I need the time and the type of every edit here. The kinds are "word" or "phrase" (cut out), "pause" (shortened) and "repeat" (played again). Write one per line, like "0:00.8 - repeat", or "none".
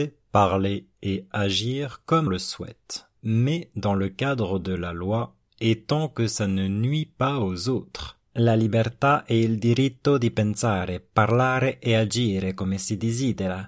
0:02.3 - word
0:08.3 - pause